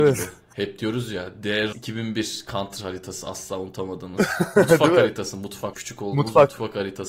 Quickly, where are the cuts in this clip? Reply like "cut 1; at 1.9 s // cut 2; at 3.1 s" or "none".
cut 1; at 1.7 s // cut 2; at 5.7 s